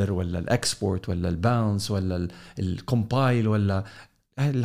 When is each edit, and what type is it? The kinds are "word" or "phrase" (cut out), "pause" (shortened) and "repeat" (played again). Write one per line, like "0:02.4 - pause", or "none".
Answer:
none